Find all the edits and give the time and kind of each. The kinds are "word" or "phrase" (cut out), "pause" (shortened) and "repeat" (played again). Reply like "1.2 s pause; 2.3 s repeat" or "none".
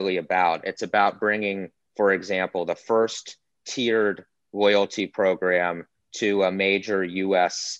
none